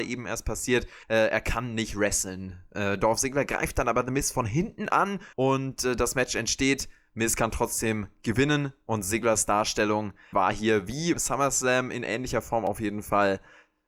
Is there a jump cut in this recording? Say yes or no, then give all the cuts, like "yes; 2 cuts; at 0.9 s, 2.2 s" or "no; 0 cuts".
yes; 4 cuts; at 1.0 s, 5.3 s, 10.3 s, 11.1 s